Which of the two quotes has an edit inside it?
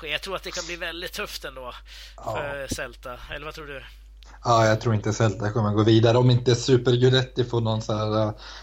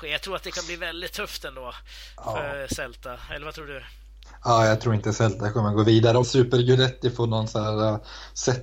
second; 1 cut; at 6.2 s

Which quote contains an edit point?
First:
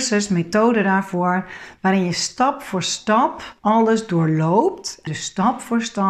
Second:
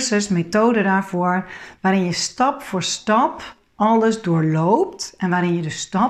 first; 2 cuts; at 3.6 s, 5.1 s

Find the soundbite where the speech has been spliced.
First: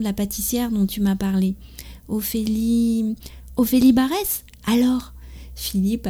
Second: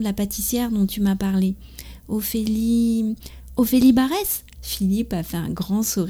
second; 1 cut; at 4.6 s

